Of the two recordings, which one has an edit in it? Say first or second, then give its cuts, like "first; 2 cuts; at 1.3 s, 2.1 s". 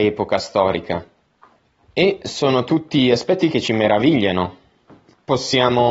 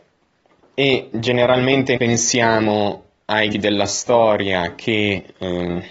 second; 2 cuts; at 2.0 s, 3.5 s